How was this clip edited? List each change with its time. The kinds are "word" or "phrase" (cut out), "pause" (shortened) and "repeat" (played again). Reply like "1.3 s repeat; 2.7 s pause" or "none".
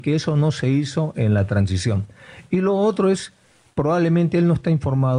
none